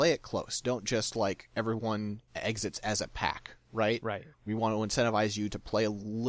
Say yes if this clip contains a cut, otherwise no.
yes